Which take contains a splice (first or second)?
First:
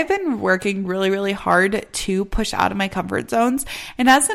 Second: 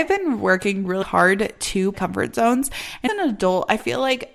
second